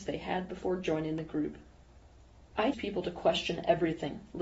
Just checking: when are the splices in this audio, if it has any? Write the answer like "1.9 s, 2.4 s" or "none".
2.7 s